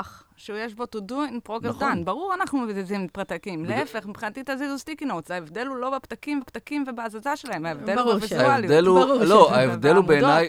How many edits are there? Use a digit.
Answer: 1